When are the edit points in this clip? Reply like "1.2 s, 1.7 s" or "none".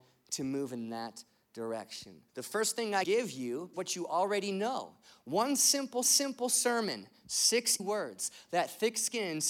2.3 s, 3.0 s, 3.7 s, 6.0 s, 7.8 s